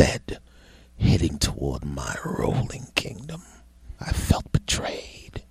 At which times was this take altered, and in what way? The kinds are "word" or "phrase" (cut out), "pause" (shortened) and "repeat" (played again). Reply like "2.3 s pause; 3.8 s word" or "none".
4.0 s pause